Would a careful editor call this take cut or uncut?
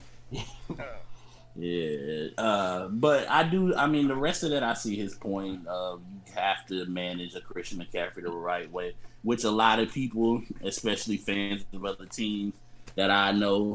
uncut